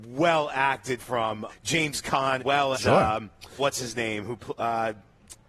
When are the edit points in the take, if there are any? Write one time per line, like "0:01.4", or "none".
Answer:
0:01.0
0:01.5
0:02.4
0:02.7
0:03.6